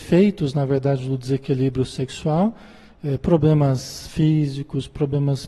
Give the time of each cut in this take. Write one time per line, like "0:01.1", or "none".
none